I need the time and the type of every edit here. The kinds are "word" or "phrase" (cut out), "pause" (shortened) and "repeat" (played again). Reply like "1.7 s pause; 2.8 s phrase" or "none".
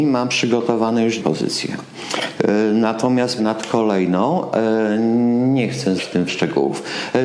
1.2 s word; 3.4 s word; 6.0 s word; 6.3 s phrase